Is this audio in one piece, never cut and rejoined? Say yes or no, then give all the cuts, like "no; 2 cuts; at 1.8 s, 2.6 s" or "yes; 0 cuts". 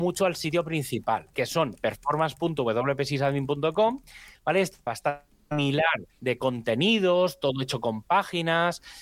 no; 4 cuts; at 1.3 s, 1.8 s, 4.9 s, 6.1 s